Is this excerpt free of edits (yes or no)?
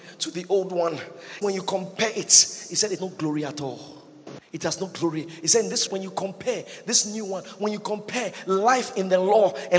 no